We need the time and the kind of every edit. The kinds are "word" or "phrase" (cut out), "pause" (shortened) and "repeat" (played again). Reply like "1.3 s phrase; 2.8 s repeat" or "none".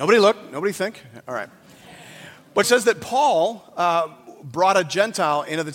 2.6 s phrase